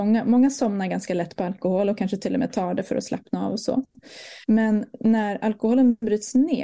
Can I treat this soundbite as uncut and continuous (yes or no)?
no